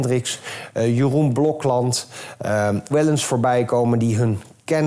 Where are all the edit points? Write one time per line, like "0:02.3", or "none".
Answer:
0:02.9